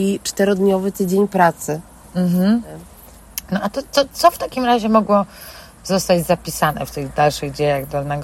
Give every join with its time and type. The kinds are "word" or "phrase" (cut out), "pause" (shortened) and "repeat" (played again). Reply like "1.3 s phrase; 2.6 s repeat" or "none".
none